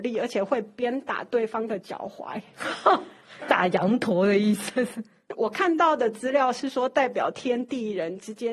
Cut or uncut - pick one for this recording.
cut